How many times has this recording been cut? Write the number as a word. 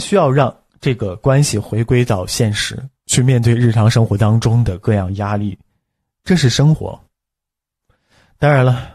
zero